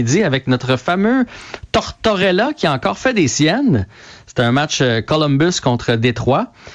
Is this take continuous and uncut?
yes; 0 cuts

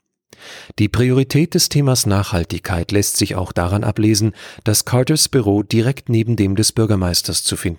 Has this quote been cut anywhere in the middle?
no; 0 cuts

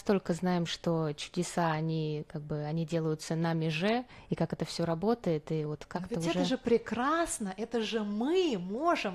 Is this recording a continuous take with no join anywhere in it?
yes; 0 cuts

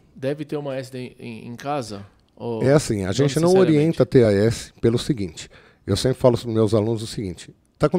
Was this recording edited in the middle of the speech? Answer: no; 0 cuts

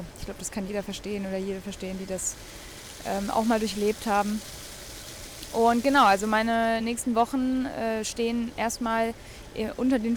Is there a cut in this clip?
no; 0 cuts

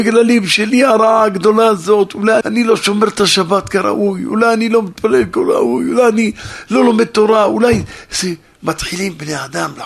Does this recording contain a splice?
yes; 1 cut; at 2.4 s

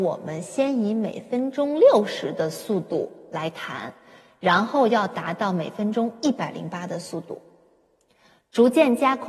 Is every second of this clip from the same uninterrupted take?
yes; 0 cuts

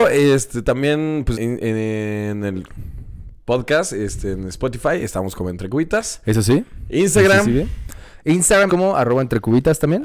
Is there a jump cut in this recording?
yes; 2 cuts; at 1.3 s, 8.7 s

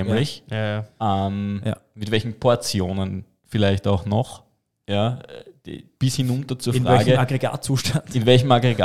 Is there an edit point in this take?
yes; 1 cut; at 6.0 s

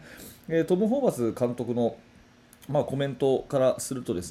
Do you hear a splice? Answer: no; 0 cuts

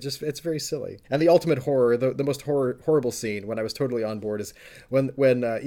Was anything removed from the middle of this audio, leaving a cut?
yes; 1 cut; at 1.0 s

